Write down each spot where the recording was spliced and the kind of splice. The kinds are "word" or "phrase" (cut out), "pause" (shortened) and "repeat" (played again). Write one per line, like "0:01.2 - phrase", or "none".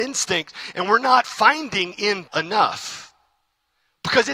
0:02.3 - word